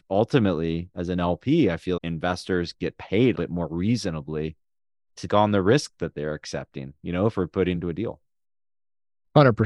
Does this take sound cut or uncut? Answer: cut